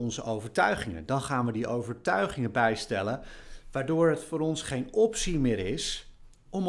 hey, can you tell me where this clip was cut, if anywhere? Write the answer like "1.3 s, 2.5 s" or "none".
none